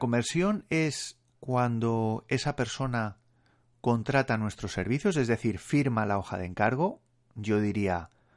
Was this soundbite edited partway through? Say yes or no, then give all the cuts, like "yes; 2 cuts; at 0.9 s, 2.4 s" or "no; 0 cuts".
no; 0 cuts